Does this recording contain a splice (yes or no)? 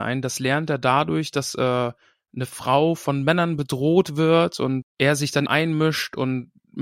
yes